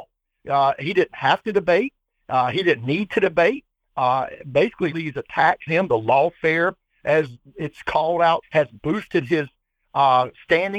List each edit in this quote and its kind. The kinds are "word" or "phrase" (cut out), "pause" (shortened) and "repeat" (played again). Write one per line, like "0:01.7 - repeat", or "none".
0:04.9 - word
0:05.7 - word
0:08.4 - word